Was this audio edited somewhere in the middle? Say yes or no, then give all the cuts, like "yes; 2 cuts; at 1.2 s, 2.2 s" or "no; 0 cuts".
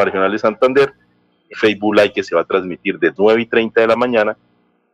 yes; 2 cuts; at 1.5 s, 3.2 s